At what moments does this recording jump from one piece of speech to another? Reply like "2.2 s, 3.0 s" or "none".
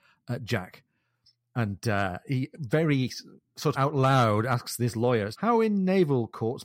3.7 s, 5.3 s